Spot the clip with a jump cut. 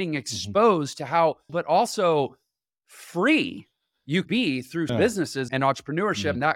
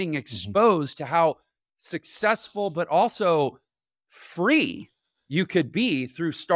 first; 4 cuts; at 1.5 s, 4.3 s, 4.9 s, 5.5 s

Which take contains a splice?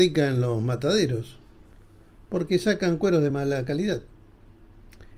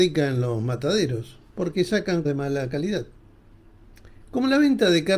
second; 2 cuts; at 1.5 s, 2.2 s

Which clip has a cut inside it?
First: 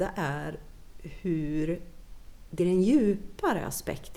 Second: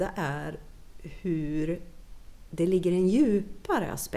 first; 1 cut; at 2.6 s

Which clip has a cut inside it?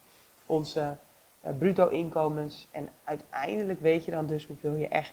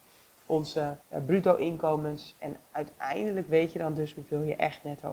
second; 1 cut; at 1.0 s

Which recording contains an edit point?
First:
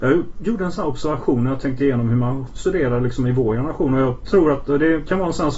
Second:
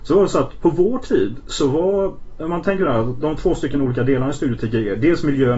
first; 1 cut; at 2.5 s

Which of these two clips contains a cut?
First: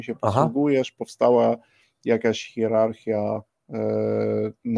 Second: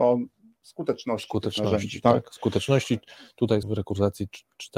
second; 1 cut; at 3.6 s

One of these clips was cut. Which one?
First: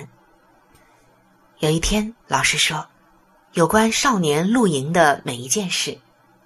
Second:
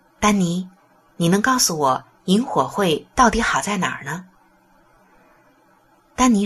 first; 2 cuts; at 2.2 s, 2.9 s

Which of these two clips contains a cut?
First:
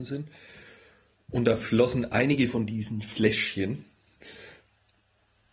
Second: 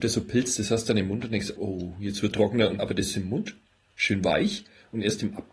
second; 4 cuts; at 1.6 s, 2.3 s, 2.8 s, 3.1 s

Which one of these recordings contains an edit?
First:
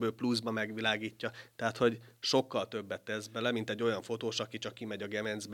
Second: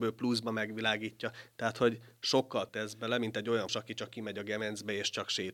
second; 2 cuts; at 2.7 s, 3.7 s

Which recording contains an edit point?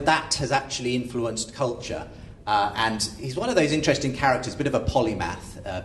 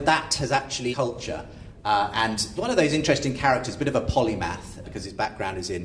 second; 3 cuts; at 0.9 s, 2.6 s, 4.8 s

